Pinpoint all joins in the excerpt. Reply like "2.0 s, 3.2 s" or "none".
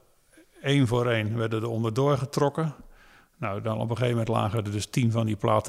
none

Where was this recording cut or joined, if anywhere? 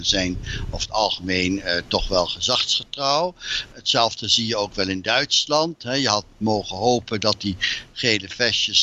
none

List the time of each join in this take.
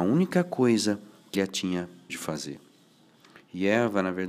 1.3 s, 2.1 s

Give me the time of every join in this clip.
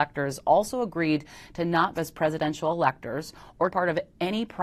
1.9 s, 3.7 s

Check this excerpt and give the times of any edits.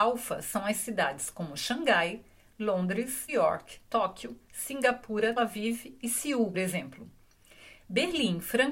3.3 s, 3.8 s, 5.4 s, 6.5 s

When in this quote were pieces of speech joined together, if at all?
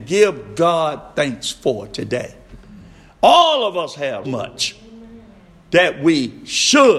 4.2 s

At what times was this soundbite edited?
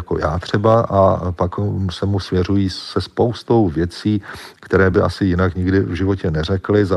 none

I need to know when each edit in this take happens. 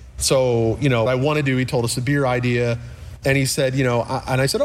1.1 s

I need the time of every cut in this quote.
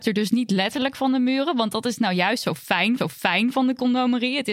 3.0 s

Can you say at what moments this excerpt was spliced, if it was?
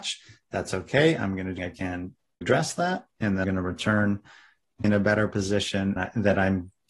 1.6 s, 2.4 s, 3.4 s, 4.8 s, 6.0 s

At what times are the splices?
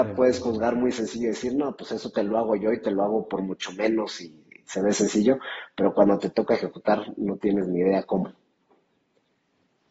none

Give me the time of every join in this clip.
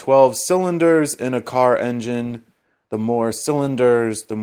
none

